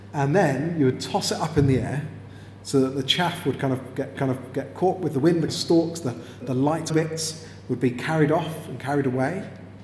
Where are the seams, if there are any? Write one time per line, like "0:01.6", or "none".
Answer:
0:04.2
0:05.5
0:06.4
0:06.9